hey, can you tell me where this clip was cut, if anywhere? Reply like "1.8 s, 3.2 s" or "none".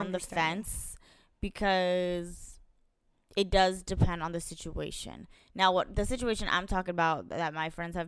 none